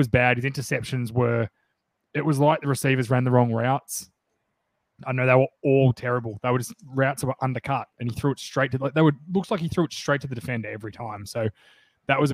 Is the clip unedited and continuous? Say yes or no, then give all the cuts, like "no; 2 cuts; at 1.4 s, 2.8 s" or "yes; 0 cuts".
yes; 0 cuts